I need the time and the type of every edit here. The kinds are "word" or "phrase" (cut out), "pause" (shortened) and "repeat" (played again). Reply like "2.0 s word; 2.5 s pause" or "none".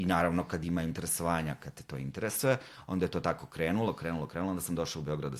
none